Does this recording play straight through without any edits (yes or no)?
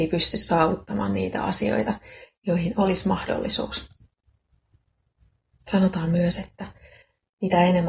yes